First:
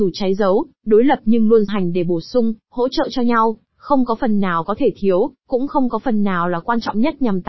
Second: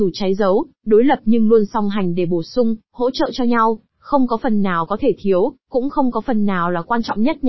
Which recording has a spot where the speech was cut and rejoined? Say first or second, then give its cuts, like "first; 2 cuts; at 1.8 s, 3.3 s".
first; 1 cut; at 1.7 s